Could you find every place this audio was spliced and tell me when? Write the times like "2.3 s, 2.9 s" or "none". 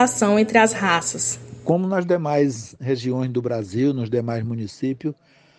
none